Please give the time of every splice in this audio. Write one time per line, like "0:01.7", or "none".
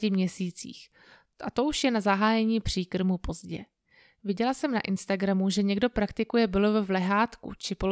none